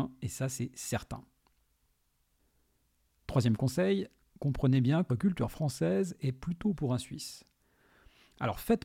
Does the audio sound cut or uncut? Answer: cut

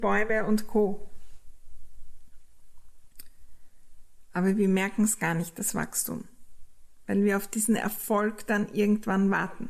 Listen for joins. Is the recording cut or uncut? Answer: uncut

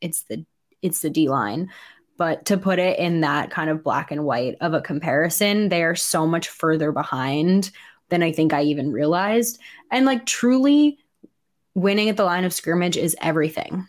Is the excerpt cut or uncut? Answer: uncut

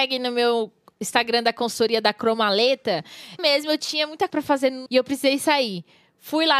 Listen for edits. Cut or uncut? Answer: cut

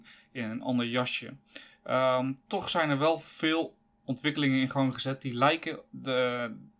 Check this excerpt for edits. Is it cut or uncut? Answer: uncut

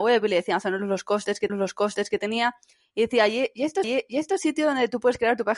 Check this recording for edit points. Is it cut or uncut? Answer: cut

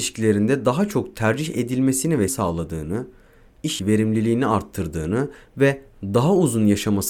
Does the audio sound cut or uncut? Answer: cut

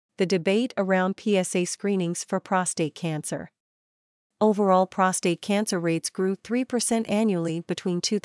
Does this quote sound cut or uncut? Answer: uncut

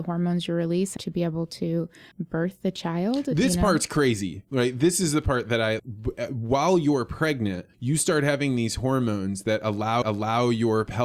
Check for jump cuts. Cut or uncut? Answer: cut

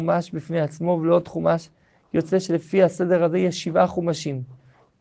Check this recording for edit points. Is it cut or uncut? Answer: uncut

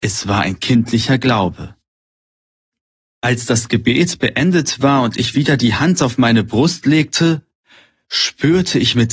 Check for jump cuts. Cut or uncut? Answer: uncut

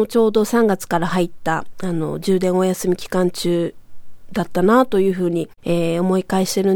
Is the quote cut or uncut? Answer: cut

